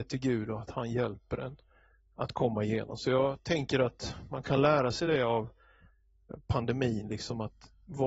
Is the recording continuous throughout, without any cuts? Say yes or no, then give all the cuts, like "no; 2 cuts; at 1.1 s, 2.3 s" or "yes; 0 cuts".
yes; 0 cuts